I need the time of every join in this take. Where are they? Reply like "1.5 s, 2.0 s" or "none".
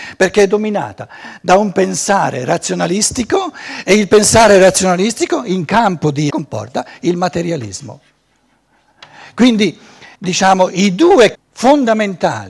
6.3 s, 10.1 s, 11.3 s